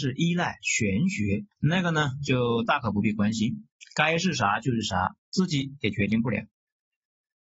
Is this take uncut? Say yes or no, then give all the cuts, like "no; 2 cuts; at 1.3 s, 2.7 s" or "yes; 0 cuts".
no; 1 cut; at 1.5 s